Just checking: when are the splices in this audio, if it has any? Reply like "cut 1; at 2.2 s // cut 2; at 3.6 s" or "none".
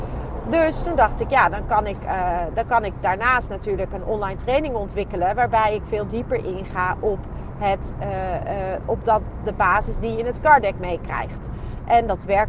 none